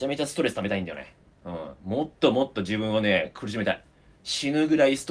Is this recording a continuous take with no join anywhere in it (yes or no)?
yes